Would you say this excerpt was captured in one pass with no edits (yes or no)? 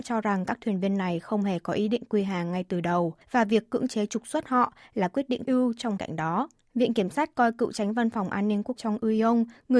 no